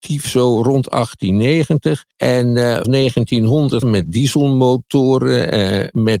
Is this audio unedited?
no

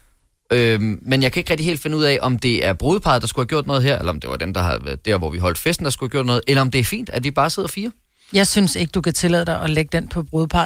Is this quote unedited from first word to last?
yes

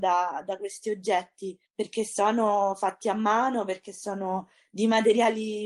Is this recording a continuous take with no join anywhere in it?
no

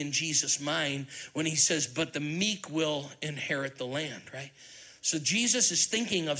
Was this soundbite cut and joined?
no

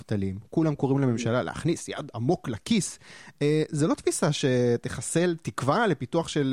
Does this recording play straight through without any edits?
yes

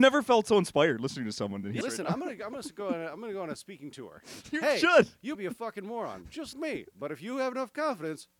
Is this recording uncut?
no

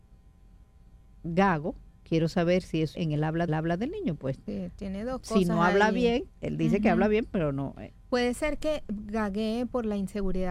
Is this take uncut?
no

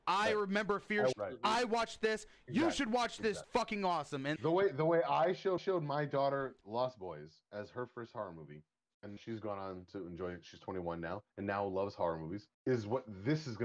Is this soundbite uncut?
no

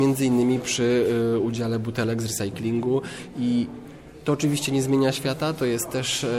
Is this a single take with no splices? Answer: yes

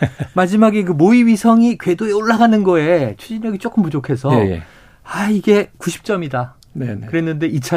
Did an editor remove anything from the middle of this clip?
no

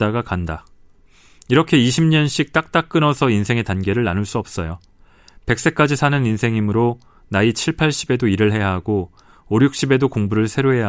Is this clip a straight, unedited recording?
yes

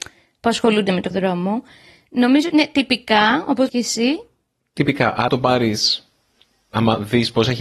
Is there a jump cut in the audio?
yes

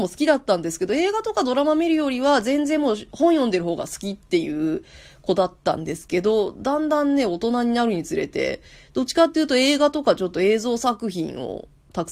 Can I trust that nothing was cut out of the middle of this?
yes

